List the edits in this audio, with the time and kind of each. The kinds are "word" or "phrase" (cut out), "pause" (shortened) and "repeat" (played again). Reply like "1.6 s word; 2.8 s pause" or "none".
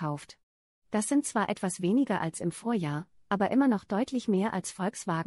none